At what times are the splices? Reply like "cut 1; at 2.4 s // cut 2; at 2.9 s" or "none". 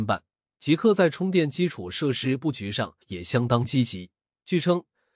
cut 1; at 3.0 s